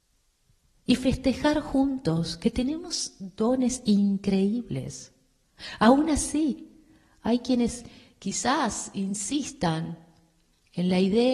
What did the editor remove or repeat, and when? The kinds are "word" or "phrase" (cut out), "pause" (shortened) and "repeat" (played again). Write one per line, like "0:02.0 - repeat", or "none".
none